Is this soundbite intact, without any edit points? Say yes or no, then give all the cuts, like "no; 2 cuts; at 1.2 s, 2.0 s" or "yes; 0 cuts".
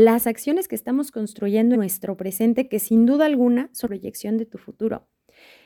no; 2 cuts; at 1.7 s, 3.9 s